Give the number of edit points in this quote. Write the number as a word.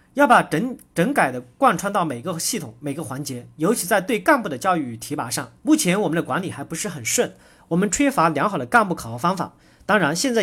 one